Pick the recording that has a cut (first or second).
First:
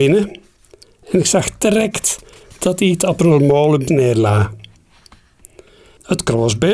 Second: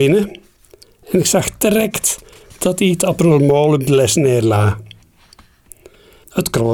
first